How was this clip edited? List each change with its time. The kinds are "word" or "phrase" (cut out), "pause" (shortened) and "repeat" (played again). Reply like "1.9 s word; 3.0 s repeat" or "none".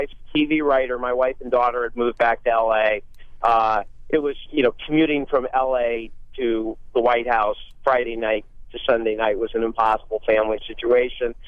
4.5 s word